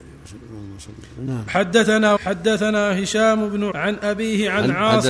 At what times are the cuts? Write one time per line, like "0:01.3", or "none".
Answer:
0:02.2
0:03.7